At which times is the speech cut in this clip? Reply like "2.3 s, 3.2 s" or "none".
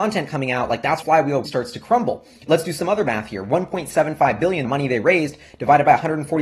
1.0 s, 1.4 s, 2.5 s, 4.6 s